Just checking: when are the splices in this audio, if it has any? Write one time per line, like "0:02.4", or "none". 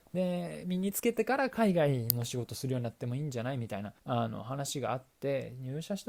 0:04.0